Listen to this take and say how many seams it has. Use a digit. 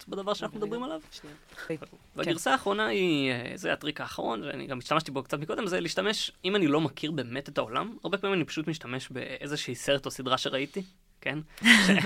0